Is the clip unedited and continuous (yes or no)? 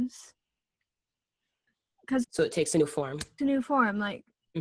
no